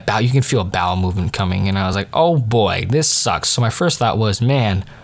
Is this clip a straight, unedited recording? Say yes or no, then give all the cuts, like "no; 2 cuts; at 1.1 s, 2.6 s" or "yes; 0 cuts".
yes; 0 cuts